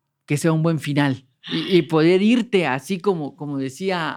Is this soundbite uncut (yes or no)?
yes